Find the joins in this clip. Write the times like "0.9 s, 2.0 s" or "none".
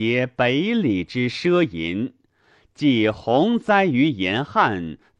none